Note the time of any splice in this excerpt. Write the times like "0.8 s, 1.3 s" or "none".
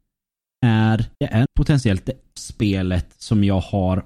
1.1 s, 1.5 s, 2.4 s